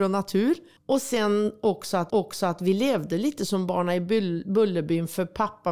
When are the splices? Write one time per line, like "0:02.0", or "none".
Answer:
0:02.1